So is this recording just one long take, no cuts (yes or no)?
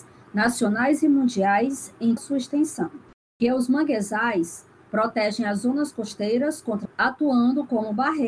no